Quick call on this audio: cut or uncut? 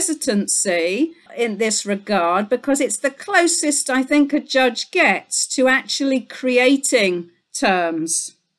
uncut